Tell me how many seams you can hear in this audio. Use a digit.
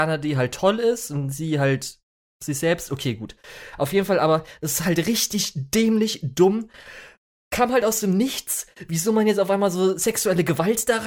0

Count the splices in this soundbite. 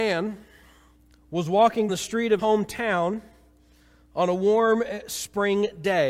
2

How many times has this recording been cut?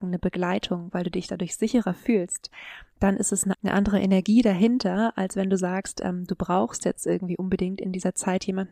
1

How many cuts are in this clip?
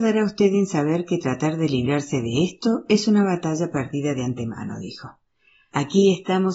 0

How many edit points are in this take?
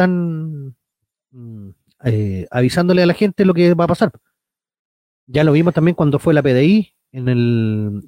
0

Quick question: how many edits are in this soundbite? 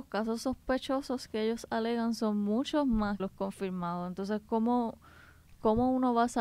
1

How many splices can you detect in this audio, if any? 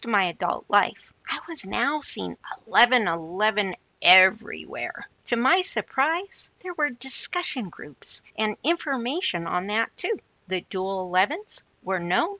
5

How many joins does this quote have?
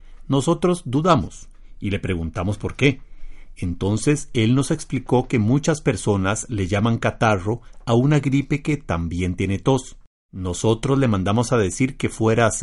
1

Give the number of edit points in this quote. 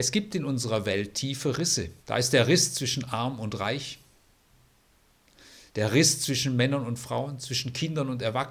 2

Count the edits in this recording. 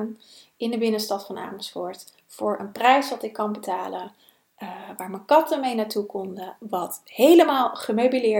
0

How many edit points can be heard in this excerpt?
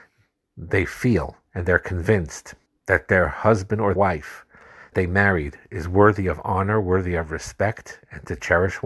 4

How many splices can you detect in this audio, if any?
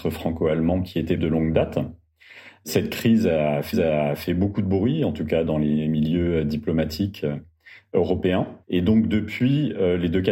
3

